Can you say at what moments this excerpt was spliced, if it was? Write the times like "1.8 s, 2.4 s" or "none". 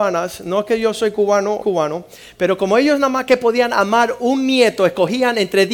1.6 s